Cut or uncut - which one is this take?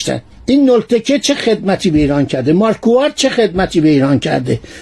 uncut